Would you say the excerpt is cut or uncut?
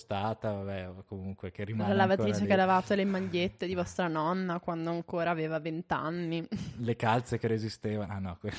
uncut